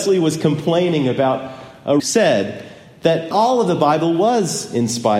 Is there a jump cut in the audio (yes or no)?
yes